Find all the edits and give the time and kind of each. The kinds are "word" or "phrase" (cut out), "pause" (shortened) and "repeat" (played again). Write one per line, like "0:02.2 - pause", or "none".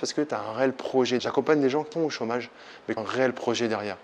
0:01.2 - word
0:01.9 - word
0:03.0 - word

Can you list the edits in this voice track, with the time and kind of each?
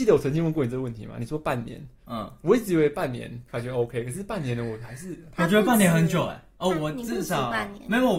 none

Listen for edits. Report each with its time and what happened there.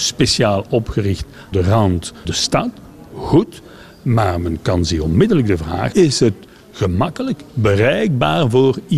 0:01.5 - word
0:02.2 - word
0:05.9 - word

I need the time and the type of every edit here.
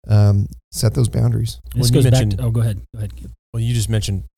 none

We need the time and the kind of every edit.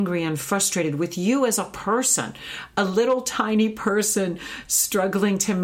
none

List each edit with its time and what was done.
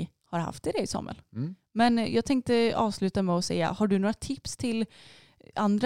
none

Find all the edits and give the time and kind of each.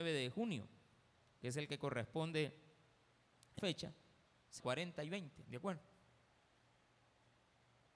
0:03.6 - word
0:04.6 - word

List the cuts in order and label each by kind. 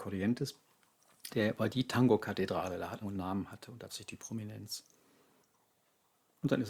0:01.3 - word
0:03.0 - phrase
0:03.9 - word

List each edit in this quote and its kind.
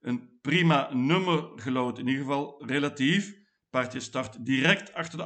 none

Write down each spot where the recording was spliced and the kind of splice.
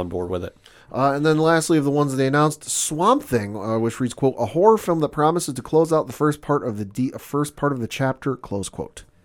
none

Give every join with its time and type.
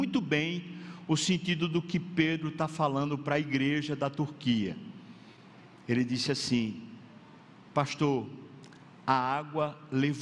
none

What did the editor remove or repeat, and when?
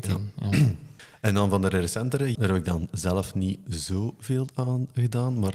0:02.3 - word

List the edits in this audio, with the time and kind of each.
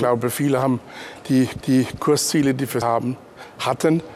0:01.6 - repeat
0:02.8 - word

